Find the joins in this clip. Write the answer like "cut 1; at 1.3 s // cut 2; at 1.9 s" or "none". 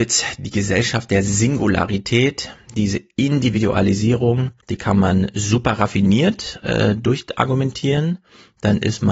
cut 1; at 4.6 s

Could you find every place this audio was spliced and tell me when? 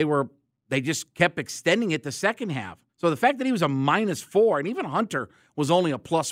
cut 1; at 2.9 s

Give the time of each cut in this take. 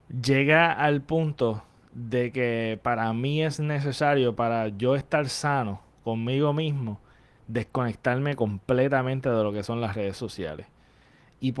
none

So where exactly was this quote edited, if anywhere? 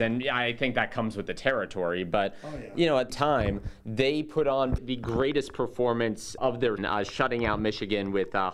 cut 1; at 3.1 s // cut 2; at 4.8 s // cut 3; at 6.4 s // cut 4; at 6.8 s

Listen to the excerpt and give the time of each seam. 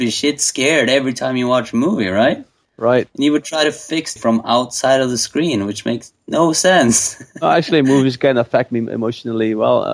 cut 1; at 4.2 s

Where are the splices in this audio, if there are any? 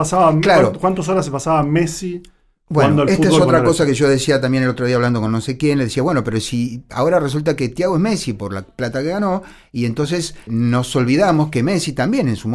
cut 1; at 10.5 s

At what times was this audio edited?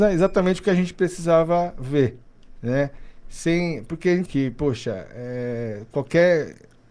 cut 1; at 4.3 s

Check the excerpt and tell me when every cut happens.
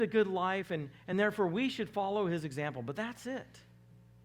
none

